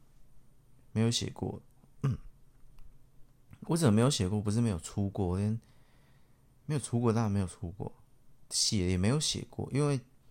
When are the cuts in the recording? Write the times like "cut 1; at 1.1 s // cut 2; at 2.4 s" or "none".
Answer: none